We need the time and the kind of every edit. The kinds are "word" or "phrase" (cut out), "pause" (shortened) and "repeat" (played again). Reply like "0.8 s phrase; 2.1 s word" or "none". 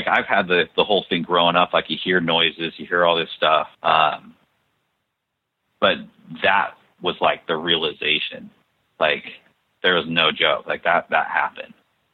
3.7 s pause